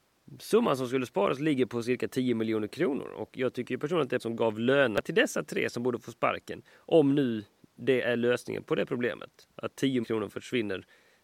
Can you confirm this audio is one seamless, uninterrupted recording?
no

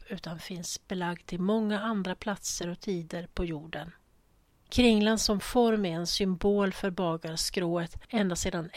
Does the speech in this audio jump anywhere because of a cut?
no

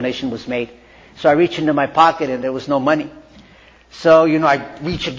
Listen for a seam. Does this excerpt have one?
no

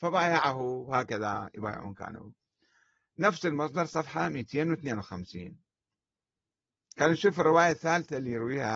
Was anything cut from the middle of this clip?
no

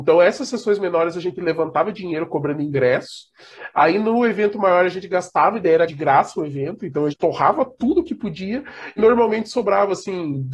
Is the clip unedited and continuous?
no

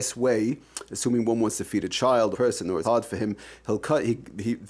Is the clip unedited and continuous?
no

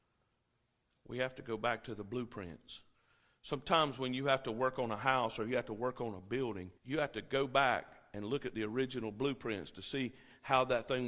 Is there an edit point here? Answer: yes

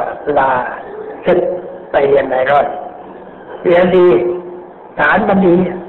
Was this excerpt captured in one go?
no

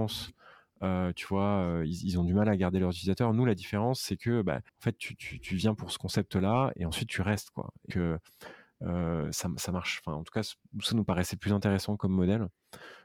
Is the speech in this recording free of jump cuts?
no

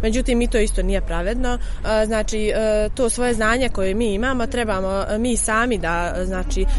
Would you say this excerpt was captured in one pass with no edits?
yes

